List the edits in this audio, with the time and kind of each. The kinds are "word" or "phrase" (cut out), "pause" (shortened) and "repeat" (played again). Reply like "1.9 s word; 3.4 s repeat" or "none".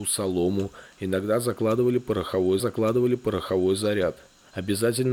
2.6 s repeat